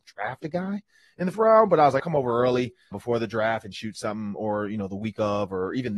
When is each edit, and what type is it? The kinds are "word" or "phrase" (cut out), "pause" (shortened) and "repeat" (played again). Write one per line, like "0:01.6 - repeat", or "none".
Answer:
0:01.3 - word
0:02.0 - word
0:02.9 - word